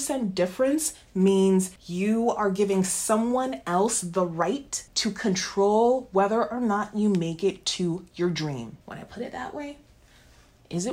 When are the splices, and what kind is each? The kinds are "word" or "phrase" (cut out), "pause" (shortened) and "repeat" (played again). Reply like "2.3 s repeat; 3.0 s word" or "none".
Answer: 1.8 s pause; 4.9 s pause; 8.8 s pause